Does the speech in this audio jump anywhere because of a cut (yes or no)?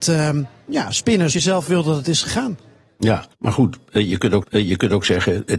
yes